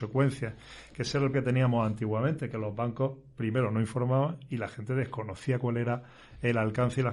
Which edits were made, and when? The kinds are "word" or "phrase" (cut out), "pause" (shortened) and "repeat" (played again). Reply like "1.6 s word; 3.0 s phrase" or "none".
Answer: 1.3 s word

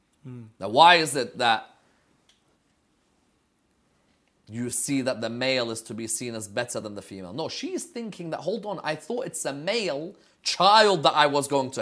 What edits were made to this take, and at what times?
none

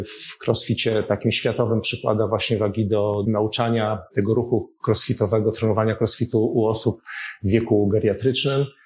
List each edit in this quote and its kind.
none

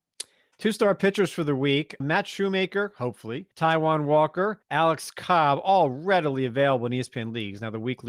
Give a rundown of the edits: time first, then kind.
2.0 s word; 3.5 s pause; 4.6 s pause

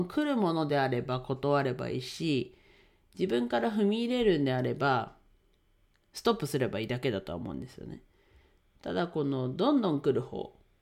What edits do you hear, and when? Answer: none

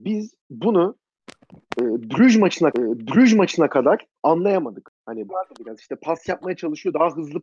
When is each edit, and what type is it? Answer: 2.7 s repeat; 5.3 s phrase

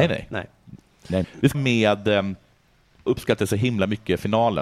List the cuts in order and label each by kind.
1.2 s word; 1.5 s word; 3.1 s phrase

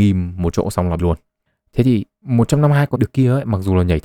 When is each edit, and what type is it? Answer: 1.0 s phrase; 1.5 s pause; 3.0 s word

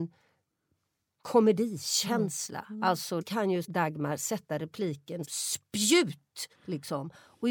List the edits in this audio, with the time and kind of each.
3.2 s phrase; 3.6 s word; 5.2 s word; 6.5 s pause

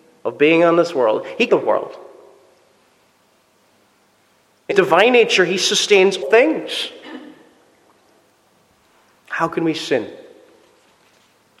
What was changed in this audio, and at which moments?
1.5 s word; 4.7 s word; 6.2 s word

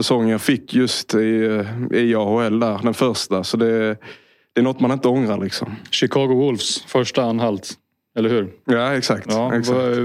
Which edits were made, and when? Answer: none

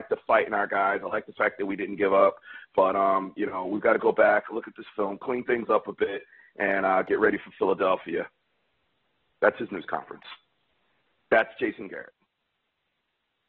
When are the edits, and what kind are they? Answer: none

